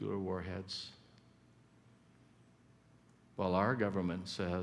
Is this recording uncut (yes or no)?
yes